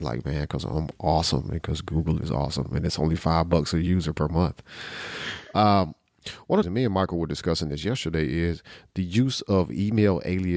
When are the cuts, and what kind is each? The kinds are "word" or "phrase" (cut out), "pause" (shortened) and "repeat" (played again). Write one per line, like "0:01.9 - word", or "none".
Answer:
0:06.6 - phrase

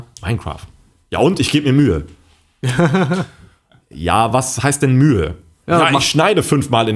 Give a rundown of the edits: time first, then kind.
none

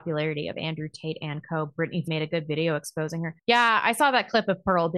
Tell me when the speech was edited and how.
0:02.1 - word
0:03.4 - pause

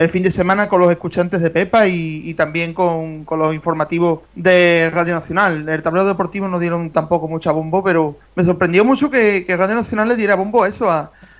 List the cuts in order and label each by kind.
0:04.3 - pause
0:08.3 - pause

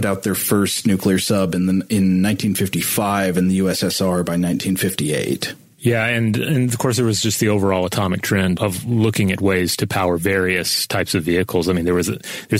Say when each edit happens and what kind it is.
0:08.6 - word

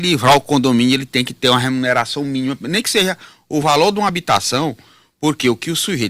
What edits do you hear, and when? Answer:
none

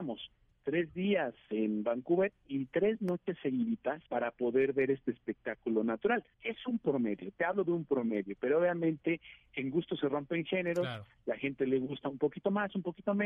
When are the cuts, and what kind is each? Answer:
0:04.1 - pause
0:06.3 - pause

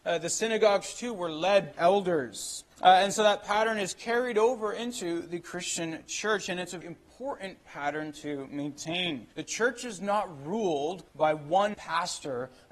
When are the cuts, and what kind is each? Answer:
0:01.7 - phrase
0:02.7 - pause
0:06.8 - word
0:09.3 - pause
0:11.1 - pause
0:11.7 - word

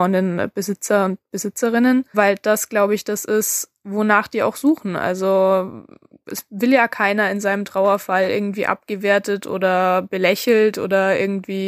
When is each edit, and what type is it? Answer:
none

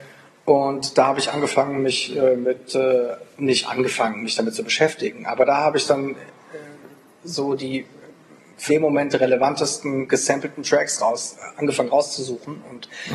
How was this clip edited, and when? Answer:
0:08.7 - phrase

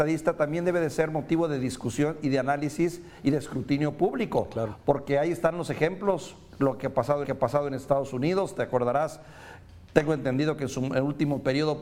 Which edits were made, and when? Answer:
0:07.2 - repeat

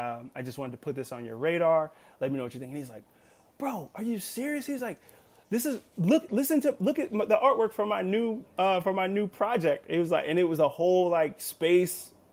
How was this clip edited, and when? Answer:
none

